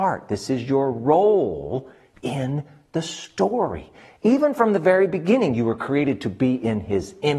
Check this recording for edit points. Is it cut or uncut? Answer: uncut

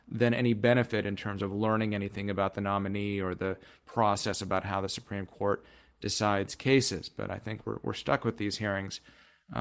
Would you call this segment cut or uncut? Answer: uncut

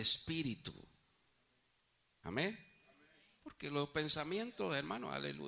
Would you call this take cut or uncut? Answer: uncut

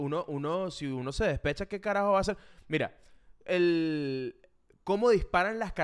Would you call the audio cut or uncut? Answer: uncut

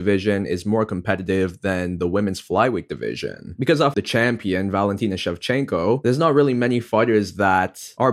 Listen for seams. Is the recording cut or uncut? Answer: cut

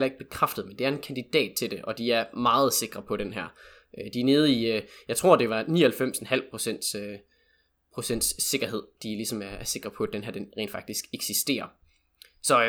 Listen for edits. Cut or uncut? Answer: uncut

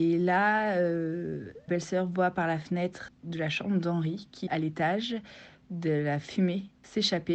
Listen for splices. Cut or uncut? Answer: cut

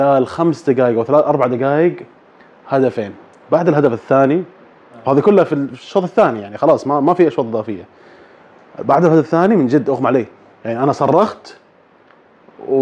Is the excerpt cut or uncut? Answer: uncut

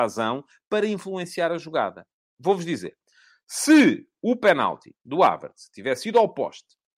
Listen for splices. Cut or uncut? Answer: uncut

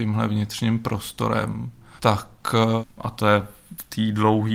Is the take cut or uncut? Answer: uncut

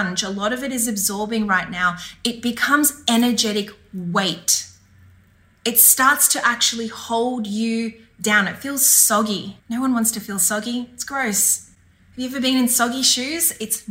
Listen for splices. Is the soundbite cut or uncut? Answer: cut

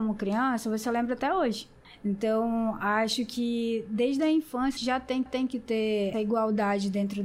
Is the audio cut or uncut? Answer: cut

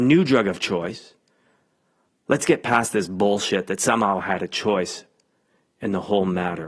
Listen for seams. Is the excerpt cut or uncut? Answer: uncut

